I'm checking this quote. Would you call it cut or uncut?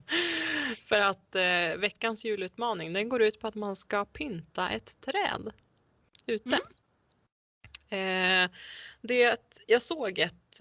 uncut